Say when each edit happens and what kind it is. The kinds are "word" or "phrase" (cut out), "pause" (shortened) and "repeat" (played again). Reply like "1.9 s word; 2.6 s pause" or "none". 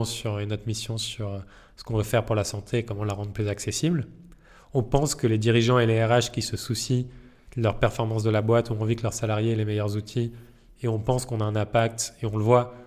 none

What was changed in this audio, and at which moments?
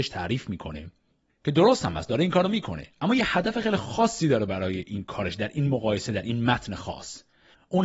none

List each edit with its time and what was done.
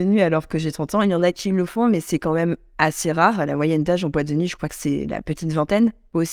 none

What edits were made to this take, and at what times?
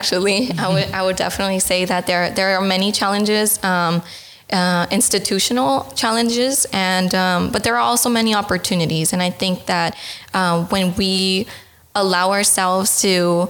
none

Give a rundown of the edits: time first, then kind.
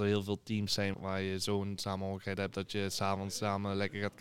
0.9 s word

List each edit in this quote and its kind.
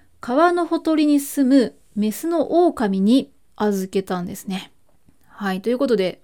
4.8 s pause

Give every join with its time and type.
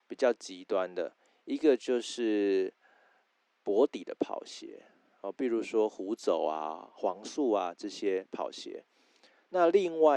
none

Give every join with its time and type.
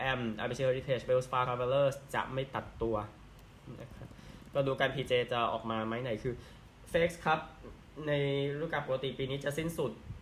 1.4 s word

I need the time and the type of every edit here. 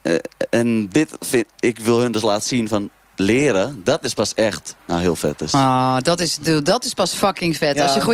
4.8 s pause

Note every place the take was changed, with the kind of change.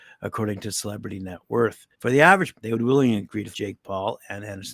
1.9 s pause; 2.5 s word; 3.5 s word

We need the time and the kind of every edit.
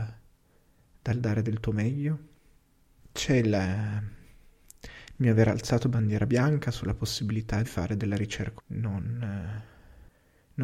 7.6 s phrase; 8.6 s phrase

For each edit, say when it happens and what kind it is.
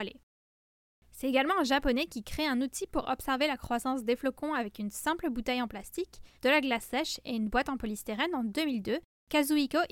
6.4 s pause

